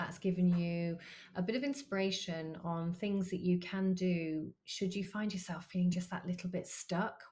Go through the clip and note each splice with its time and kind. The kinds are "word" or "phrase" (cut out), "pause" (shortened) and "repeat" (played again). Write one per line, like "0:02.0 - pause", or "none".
none